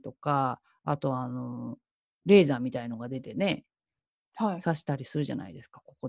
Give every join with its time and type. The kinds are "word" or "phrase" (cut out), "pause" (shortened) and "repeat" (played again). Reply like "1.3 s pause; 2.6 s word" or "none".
none